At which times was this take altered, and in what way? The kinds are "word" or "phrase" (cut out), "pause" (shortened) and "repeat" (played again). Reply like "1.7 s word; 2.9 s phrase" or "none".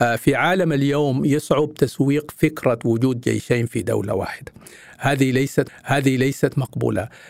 5.7 s repeat